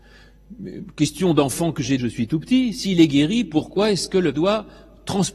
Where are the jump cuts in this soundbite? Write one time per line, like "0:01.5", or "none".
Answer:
0:02.0
0:04.3